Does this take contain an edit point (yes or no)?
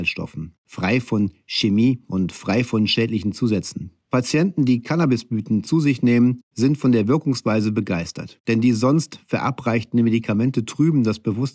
no